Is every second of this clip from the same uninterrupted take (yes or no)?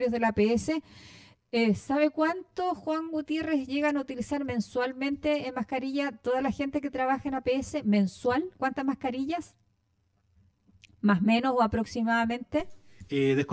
yes